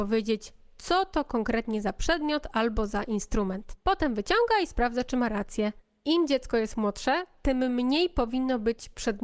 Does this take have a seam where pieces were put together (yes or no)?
no